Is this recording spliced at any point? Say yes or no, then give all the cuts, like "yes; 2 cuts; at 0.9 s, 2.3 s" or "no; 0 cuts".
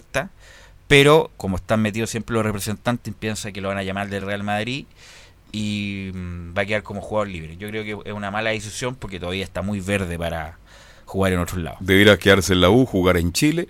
no; 0 cuts